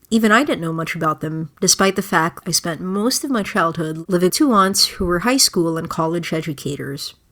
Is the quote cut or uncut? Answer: cut